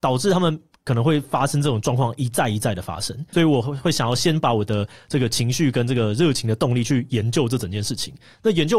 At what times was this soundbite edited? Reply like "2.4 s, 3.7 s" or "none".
3.3 s